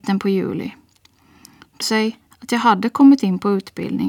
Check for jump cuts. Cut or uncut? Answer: cut